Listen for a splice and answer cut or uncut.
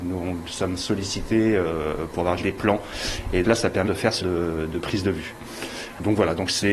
cut